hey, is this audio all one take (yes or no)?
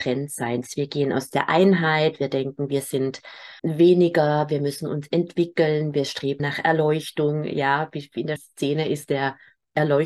no